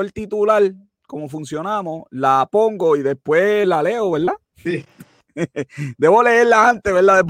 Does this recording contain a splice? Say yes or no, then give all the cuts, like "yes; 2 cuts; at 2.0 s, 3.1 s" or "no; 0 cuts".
yes; 1 cut; at 4.4 s